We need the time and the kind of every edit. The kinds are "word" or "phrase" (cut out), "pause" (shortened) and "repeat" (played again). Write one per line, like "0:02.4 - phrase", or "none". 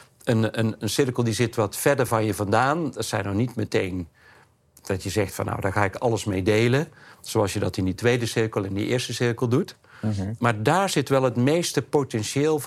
none